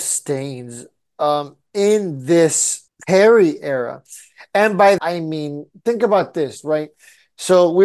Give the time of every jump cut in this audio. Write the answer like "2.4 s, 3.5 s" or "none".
2.9 s, 5.0 s